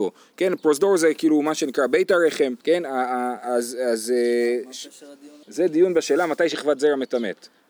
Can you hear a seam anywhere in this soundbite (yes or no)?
yes